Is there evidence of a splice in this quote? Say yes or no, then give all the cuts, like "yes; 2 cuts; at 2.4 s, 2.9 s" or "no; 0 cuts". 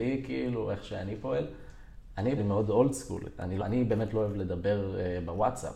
yes; 2 cuts; at 2.4 s, 3.6 s